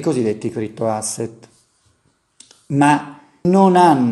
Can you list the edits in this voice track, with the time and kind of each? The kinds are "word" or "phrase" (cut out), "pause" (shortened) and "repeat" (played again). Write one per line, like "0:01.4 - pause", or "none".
none